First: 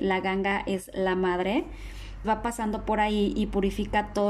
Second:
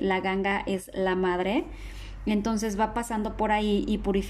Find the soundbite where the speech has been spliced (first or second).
first